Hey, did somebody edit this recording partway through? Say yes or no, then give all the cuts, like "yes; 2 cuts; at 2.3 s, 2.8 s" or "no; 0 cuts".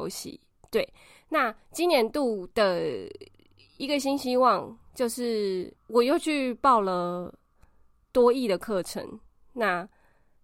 yes; 1 cut; at 5.8 s